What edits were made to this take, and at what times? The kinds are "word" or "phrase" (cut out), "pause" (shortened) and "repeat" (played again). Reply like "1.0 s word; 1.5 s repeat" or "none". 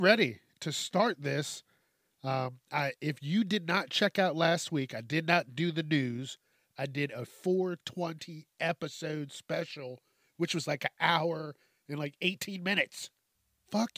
none